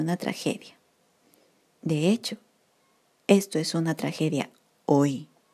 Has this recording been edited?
no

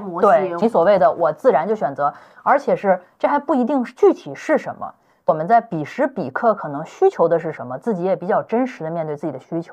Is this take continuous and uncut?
yes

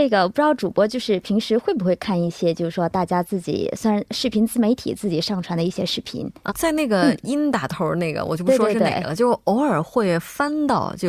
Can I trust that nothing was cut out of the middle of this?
no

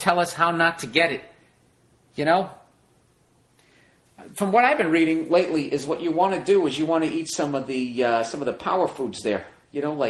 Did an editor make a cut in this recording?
no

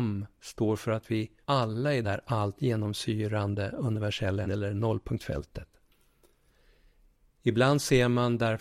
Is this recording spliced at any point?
yes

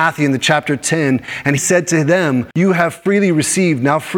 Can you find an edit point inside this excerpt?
yes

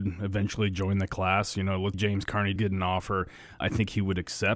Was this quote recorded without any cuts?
no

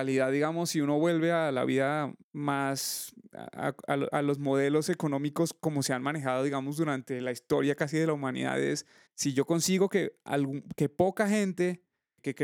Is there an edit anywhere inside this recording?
yes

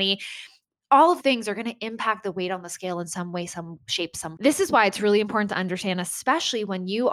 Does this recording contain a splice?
yes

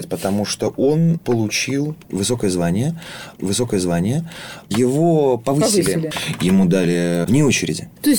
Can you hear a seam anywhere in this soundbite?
yes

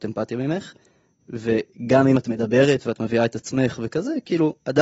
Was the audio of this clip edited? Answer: no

